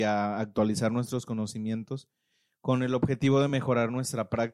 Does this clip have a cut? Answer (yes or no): no